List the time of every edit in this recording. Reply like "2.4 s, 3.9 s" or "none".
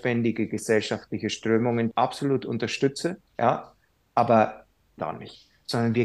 1.9 s, 3.3 s, 5.0 s